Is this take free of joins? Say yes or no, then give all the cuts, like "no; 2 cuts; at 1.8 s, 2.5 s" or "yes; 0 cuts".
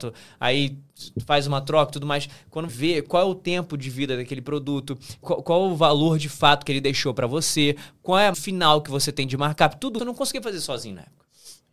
no; 4 cuts; at 2.7 s, 5.2 s, 8.3 s, 10.0 s